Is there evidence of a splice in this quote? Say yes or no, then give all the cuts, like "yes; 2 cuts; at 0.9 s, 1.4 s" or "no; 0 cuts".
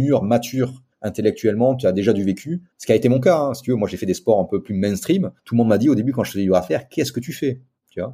yes; 3 cuts; at 0.9 s, 2.7 s, 5.4 s